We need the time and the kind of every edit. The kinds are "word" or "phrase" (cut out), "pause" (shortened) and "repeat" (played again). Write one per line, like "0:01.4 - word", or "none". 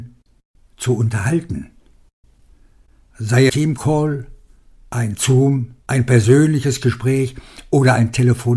0:03.5 - phrase
0:05.8 - pause